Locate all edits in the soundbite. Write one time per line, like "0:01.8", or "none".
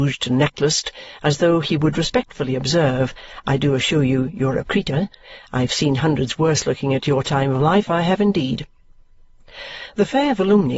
0:04.6